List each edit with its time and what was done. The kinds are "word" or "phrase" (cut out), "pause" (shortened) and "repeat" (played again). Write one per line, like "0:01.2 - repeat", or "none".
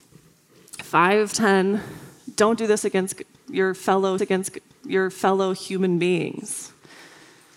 0:01.3 - word
0:04.2 - repeat